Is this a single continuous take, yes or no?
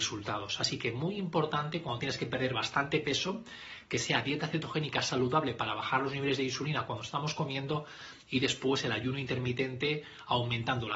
yes